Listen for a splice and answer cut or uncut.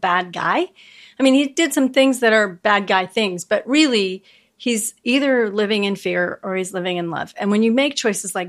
uncut